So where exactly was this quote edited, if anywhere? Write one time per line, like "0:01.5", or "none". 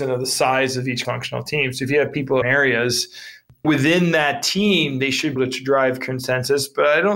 0:01.0
0:02.4
0:03.6
0:05.4